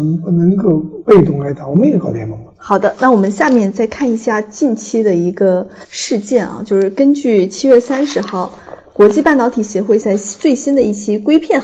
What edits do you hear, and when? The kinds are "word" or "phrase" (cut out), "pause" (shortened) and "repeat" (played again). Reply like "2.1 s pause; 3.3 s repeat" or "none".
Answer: 10.0 s word

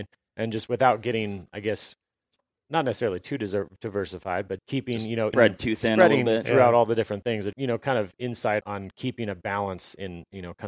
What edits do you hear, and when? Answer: 4.6 s word; 5.3 s word; 7.5 s word; 8.6 s word

